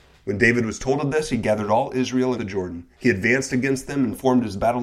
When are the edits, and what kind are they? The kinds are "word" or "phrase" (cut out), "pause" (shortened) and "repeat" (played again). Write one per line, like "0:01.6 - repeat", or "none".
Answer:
0:02.3 - phrase
0:02.9 - pause

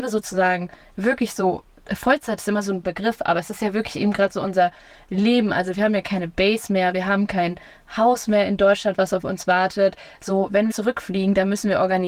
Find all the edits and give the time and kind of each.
0:02.8 - word
0:10.7 - word

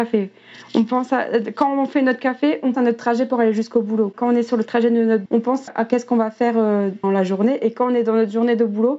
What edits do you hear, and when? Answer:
0:02.7 - word
0:05.3 - word
0:05.7 - word
0:07.0 - word

